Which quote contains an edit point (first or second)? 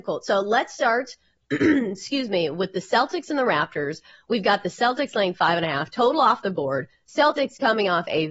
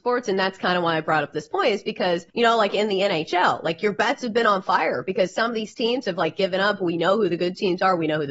second